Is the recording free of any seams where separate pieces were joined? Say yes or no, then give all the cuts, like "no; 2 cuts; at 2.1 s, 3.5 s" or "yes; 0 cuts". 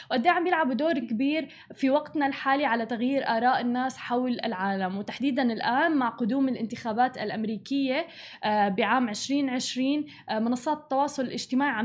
no; 1 cut; at 1.0 s